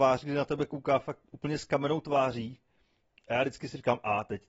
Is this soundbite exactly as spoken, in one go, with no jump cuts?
yes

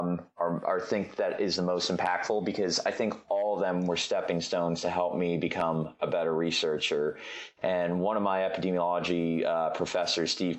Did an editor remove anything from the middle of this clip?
no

